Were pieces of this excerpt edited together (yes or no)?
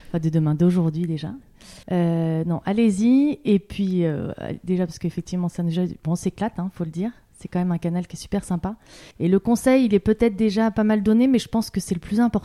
yes